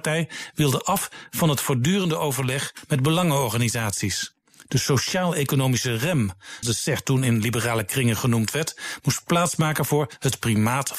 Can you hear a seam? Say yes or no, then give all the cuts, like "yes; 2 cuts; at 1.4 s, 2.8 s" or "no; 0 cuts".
yes; 1 cut; at 6.6 s